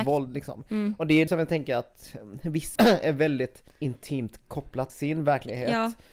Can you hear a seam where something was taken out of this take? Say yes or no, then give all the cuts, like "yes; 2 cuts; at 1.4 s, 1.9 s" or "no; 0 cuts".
yes; 4 cuts; at 1.3 s, 2.8 s, 3.7 s, 4.9 s